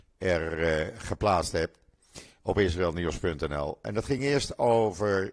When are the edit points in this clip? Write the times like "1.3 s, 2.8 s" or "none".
none

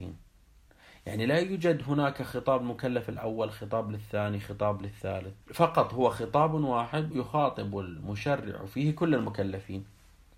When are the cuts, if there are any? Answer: 5.4 s, 7.1 s

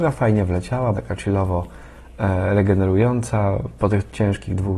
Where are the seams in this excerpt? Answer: 0.9 s

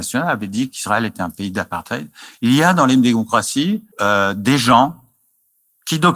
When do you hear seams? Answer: 3.9 s

